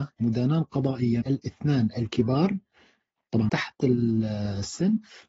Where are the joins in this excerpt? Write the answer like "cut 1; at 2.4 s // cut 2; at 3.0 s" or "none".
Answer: cut 1; at 1.2 s // cut 2; at 3.5 s